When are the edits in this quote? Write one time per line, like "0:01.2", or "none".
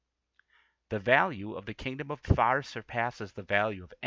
0:02.2